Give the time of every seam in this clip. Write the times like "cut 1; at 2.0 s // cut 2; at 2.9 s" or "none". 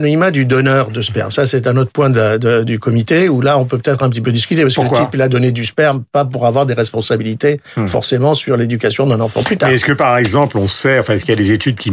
none